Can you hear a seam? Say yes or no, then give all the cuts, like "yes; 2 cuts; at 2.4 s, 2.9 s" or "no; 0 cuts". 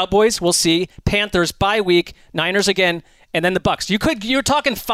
no; 0 cuts